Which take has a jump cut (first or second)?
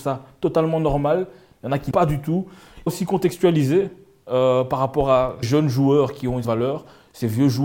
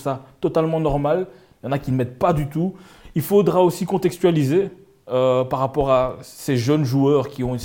first